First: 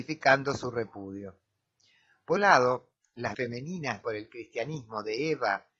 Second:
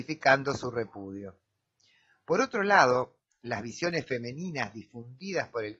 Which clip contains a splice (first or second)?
first